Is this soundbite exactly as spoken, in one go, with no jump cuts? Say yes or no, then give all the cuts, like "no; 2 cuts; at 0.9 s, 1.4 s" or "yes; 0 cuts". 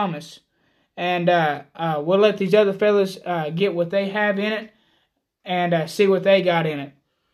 yes; 0 cuts